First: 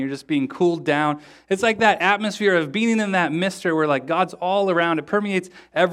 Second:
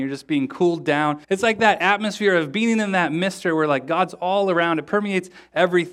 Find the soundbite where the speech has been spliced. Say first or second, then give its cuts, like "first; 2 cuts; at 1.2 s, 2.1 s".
second; 1 cut; at 1.2 s